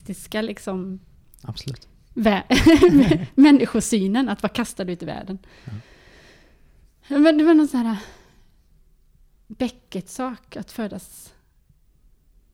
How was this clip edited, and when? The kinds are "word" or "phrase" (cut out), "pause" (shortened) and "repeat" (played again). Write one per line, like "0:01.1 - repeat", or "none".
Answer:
none